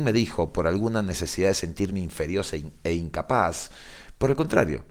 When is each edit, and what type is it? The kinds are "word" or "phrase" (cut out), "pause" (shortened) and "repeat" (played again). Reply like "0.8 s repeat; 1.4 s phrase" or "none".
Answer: none